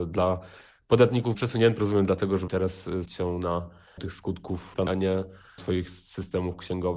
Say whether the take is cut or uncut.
cut